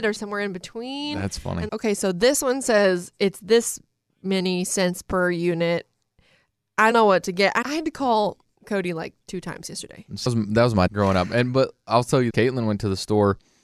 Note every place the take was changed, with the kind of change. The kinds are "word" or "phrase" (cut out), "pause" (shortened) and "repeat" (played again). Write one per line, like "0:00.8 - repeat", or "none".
0:01.7 - word
0:06.9 - word
0:07.6 - word
0:09.2 - word
0:10.3 - word
0:10.9 - word
0:12.3 - word